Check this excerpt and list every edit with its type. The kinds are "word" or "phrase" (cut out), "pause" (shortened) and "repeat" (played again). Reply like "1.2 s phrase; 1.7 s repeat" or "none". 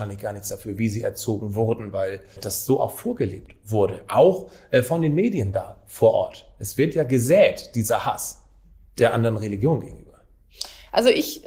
2.4 s word